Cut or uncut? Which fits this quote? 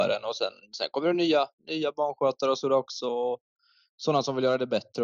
uncut